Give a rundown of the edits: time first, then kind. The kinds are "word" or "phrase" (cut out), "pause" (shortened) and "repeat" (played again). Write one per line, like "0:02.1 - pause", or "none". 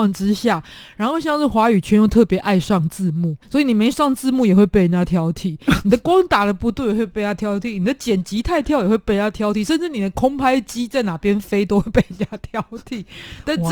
0:03.4 - pause